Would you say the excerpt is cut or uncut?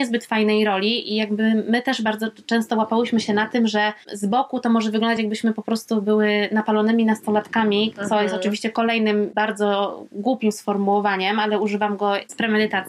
uncut